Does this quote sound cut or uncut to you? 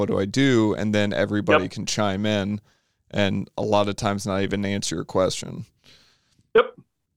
uncut